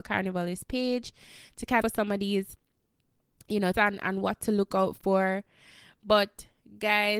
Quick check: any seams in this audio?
yes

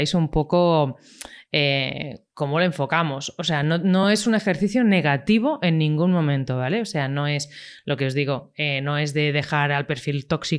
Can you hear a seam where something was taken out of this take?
no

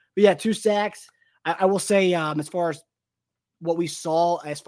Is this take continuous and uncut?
yes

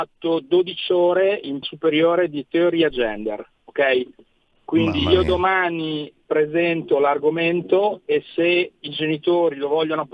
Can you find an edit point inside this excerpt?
yes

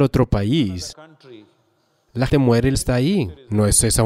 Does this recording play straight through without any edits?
no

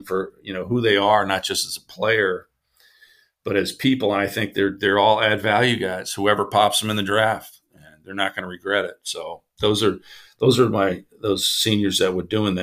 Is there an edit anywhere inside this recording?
no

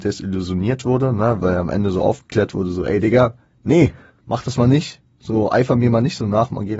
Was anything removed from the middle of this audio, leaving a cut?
yes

